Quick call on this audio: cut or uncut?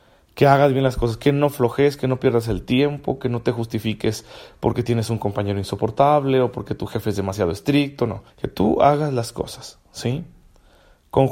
cut